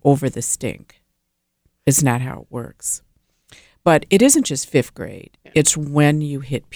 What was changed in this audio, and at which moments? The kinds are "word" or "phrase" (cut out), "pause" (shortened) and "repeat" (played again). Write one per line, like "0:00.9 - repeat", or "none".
none